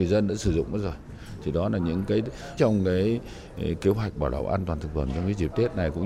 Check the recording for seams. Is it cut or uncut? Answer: cut